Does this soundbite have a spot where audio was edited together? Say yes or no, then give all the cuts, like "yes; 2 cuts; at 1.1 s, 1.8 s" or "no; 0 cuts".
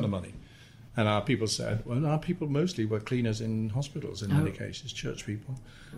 no; 0 cuts